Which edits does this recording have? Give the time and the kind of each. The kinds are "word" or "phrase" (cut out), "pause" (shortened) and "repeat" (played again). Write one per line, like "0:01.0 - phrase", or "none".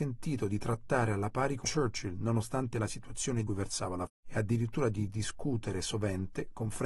0:01.6 - word
0:03.5 - phrase
0:04.1 - word